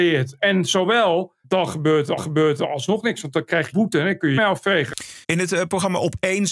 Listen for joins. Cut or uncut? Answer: cut